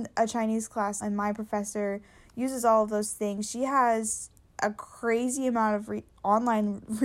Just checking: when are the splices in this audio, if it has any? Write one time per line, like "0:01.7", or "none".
0:01.0